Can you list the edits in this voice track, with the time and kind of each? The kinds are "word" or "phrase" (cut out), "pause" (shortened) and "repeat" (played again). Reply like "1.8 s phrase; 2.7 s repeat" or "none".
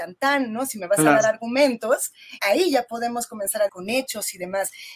2.4 s word; 3.7 s word